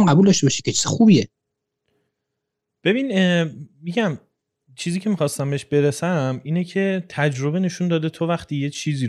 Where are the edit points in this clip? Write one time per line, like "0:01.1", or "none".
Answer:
none